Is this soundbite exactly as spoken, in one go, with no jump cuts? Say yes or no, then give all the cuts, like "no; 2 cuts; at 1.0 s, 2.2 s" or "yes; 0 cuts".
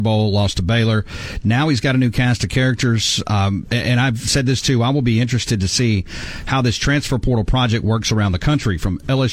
yes; 0 cuts